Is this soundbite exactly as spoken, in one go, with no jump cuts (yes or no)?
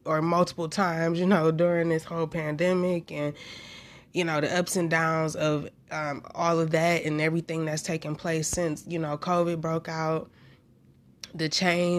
yes